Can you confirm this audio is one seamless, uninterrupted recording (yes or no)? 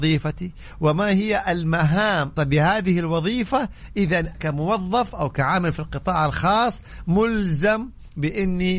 no